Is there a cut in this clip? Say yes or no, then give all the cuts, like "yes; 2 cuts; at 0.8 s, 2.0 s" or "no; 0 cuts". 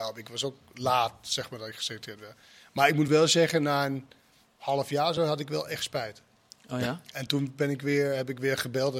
no; 0 cuts